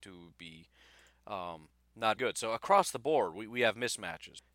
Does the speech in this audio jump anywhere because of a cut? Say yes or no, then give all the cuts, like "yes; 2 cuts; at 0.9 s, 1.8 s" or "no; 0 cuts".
yes; 1 cut; at 2.2 s